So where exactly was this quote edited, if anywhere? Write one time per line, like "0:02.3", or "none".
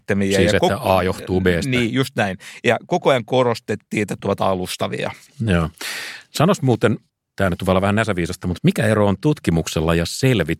0:04.2
0:08.6